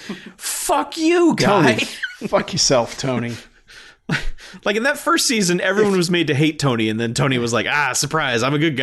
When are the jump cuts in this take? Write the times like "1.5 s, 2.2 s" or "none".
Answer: none